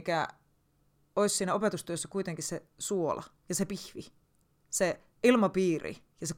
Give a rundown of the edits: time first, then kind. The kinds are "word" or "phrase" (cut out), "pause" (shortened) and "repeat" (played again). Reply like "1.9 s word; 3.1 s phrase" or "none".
5.1 s pause

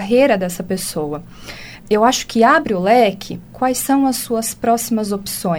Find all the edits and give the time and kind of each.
1.8 s word; 3.5 s word

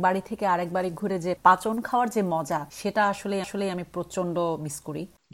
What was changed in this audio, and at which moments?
1.0 s word; 2.7 s pause; 3.4 s repeat

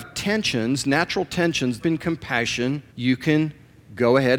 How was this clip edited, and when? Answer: 1.8 s phrase; 2.9 s pause

